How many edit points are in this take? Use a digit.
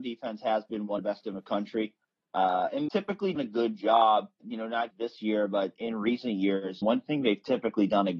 7